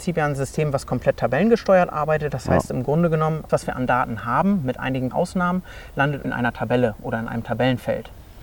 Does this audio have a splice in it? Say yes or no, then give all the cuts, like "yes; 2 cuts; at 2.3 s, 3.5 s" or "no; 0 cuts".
yes; 3 cuts; at 3.5 s, 5.1 s, 6.2 s